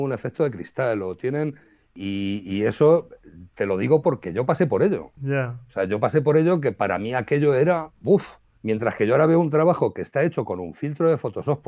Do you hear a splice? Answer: no; 0 cuts

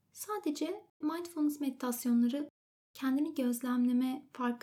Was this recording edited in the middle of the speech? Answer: yes; 1 cut; at 1.0 s

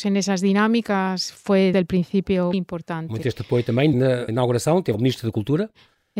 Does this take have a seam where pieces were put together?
yes; 6 cuts; at 1.7 s, 2.5 s, 3.2 s, 3.9 s, 4.3 s, 4.9 s

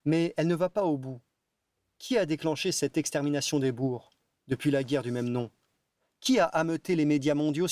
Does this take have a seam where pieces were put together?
no; 0 cuts

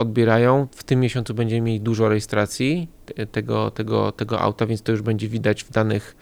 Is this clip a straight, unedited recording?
yes; 0 cuts

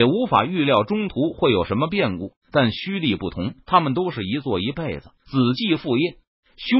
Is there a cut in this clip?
yes; 3 cuts; at 2.4 s, 3.6 s, 5.1 s

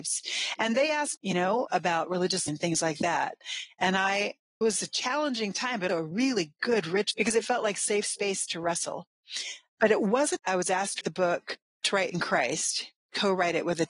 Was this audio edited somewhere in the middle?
yes; 8 cuts; at 1.2 s, 2.5 s, 4.6 s, 5.9 s, 7.1 s, 10.4 s, 11.0 s, 11.8 s

